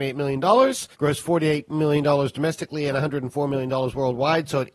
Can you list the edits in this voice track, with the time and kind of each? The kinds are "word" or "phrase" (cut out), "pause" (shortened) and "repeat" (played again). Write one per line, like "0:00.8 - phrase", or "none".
0:00.9 - pause

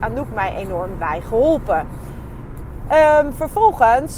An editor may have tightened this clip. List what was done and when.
none

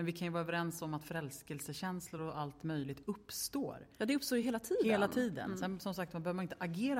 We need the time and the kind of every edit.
none

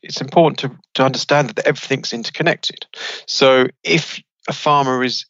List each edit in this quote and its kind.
0:03.8 - pause

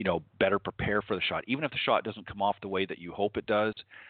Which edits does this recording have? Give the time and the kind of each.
none

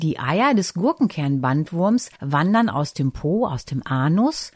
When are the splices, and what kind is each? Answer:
0:02.2 - pause

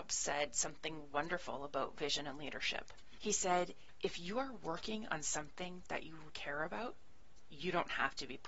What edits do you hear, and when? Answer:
0:06.3 - word

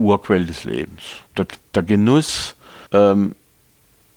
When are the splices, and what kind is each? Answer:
0:01.3 - pause
0:02.9 - pause

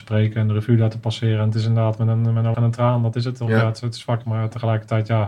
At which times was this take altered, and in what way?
0:02.5 - word
0:04.2 - word

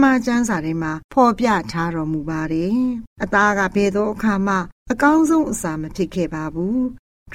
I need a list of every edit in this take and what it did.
0:03.1 - pause
0:04.8 - pause

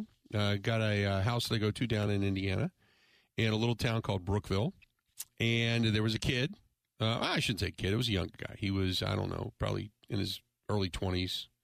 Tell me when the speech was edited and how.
none

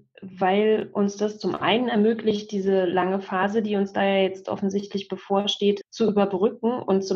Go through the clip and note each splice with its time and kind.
0:05.8 - word

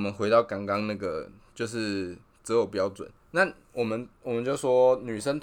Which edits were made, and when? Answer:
0:04.1 - pause

